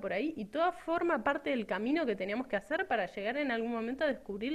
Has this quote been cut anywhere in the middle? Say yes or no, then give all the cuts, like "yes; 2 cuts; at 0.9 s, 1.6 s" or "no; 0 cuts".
no; 0 cuts